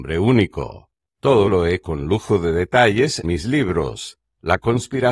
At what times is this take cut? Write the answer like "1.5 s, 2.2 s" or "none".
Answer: 1.5 s, 1.8 s, 3.2 s